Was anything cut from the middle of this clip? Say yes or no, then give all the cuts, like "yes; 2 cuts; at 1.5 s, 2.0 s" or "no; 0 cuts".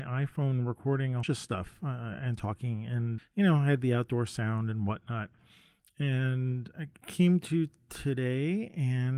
yes; 2 cuts; at 1.2 s, 3.2 s